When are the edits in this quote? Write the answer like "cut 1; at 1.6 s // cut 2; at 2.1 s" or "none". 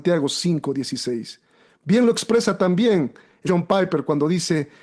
cut 1; at 3.5 s